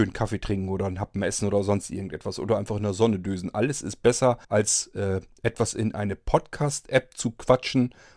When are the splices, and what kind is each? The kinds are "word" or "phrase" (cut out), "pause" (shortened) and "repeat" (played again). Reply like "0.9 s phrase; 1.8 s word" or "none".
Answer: 4.4 s pause